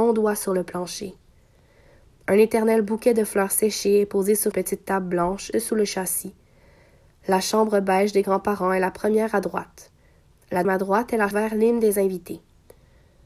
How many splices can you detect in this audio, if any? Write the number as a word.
four